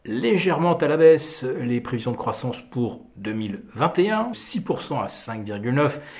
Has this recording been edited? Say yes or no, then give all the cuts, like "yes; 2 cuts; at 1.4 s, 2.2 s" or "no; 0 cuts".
yes; 1 cut; at 4.3 s